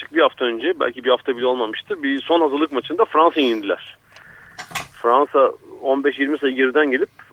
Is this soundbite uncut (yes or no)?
yes